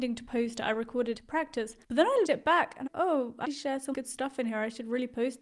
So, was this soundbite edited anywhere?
yes; 6 cuts; at 1.1 s, 1.8 s, 2.2 s, 2.9 s, 3.4 s, 3.9 s

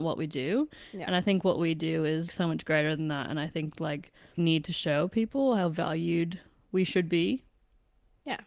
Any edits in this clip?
yes; 2 cuts; at 2.3 s, 4.4 s

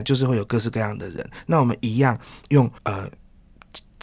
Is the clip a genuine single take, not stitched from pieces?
no; 1 cut; at 2.8 s

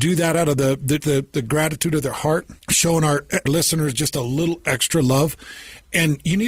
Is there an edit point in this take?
yes; 3 cuts; at 1.0 s, 2.6 s, 3.5 s

